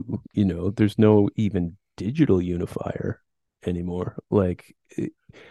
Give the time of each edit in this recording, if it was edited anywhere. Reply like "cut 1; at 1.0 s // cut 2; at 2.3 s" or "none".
none